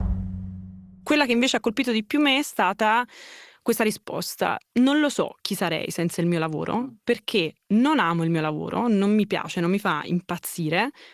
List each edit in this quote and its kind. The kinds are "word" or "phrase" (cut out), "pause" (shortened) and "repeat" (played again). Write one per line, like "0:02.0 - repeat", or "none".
none